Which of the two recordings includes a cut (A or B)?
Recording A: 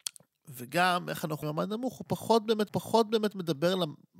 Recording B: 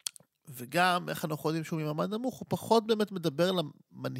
A